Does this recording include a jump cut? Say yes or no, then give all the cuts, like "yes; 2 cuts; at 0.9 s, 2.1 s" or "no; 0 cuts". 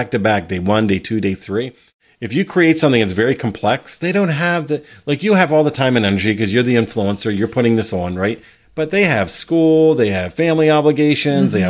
no; 0 cuts